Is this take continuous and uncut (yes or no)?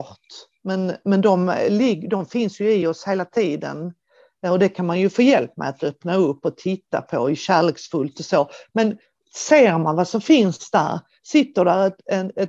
yes